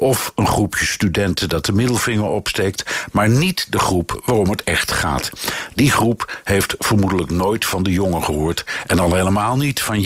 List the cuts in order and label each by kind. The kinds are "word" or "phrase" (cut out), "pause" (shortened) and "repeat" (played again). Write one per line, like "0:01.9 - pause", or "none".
none